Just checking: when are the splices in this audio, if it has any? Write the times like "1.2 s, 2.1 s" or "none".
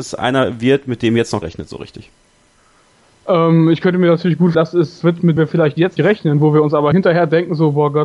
1.4 s, 4.5 s, 5.0 s, 5.4 s, 6.0 s, 6.9 s